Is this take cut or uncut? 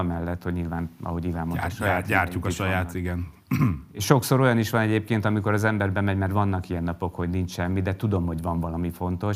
uncut